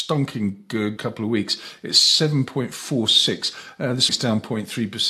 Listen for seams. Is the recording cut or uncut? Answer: cut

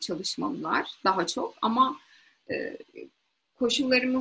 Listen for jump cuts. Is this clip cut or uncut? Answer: uncut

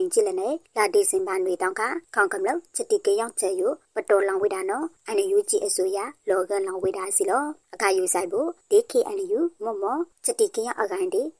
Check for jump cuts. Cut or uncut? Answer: cut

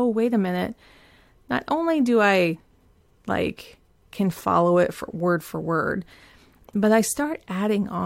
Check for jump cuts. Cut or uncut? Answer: uncut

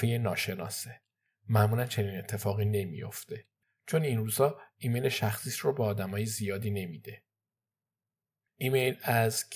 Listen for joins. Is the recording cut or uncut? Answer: uncut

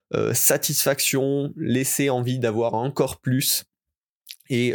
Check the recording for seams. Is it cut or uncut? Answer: uncut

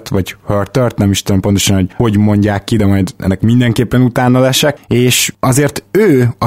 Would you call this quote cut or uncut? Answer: uncut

